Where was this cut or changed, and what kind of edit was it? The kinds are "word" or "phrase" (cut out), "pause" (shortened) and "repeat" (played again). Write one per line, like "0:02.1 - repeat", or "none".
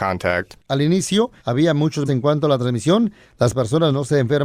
0:01.4 - pause
0:02.1 - word

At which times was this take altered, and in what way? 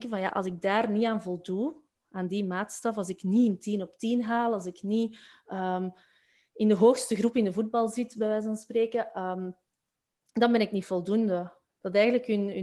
none

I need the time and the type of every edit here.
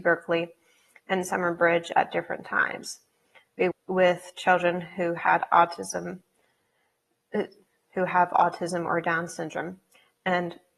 0:03.7 - word

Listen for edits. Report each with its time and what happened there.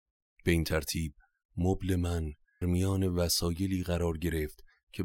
0:02.6 - word

